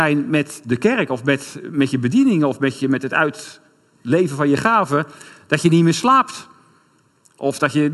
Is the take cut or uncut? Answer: uncut